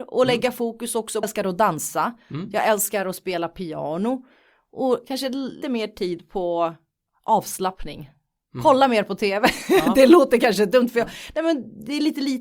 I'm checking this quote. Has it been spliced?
yes; 2 cuts; at 1.2 s, 5.6 s

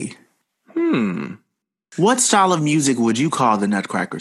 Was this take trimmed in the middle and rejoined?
no; 0 cuts

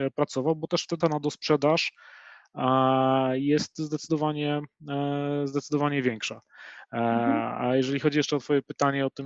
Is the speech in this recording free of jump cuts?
no; 1 cut; at 1.0 s

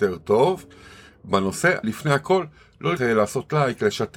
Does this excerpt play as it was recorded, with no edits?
no; 2 cuts; at 1.8 s, 3.0 s

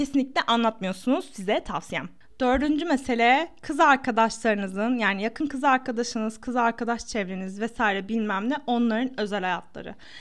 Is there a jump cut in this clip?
no; 0 cuts

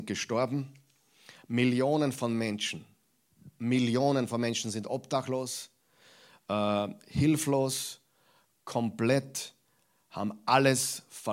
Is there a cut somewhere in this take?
no; 0 cuts

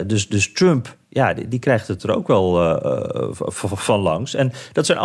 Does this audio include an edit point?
no; 0 cuts

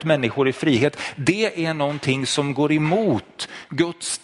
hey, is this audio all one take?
yes; 0 cuts

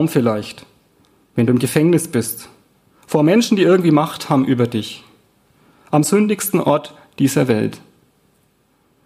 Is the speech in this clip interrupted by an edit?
no; 0 cuts

